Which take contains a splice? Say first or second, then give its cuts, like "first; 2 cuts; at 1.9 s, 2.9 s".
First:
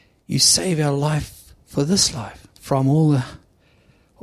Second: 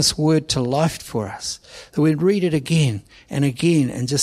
first; 1 cut; at 2.5 s